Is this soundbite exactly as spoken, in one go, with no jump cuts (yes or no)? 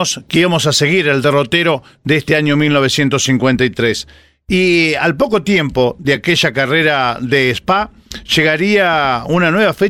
yes